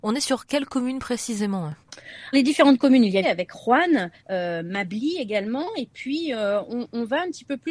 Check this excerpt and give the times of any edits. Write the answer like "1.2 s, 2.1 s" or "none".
2.3 s, 3.2 s, 4.2 s